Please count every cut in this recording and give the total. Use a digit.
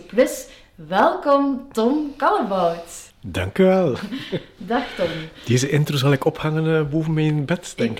1